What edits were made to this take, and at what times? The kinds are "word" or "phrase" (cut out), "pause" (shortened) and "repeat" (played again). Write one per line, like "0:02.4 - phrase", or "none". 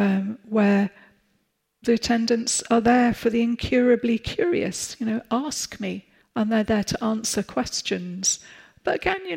0:06.2 - pause